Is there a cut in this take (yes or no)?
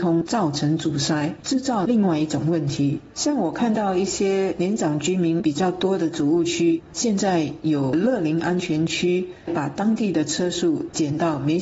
yes